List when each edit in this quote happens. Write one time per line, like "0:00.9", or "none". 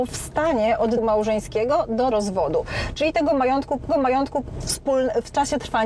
0:01.0
0:02.1
0:03.9

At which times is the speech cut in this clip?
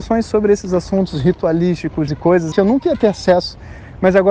0:02.1
0:02.5

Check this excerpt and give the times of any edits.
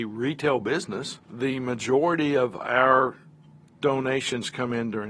0:01.2

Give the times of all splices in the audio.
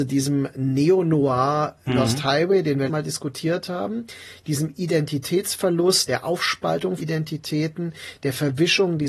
0:02.9
0:06.1
0:07.0

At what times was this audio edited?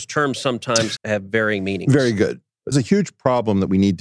0:01.0
0:02.7

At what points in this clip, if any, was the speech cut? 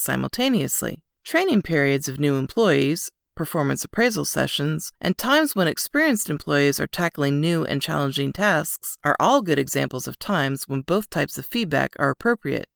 0:01.1

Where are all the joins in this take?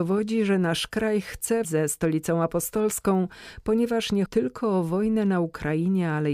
0:01.6
0:04.3

